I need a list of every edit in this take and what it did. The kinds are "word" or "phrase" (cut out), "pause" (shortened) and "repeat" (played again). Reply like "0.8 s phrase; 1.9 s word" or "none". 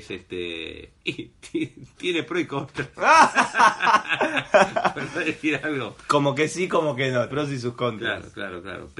7.3 s phrase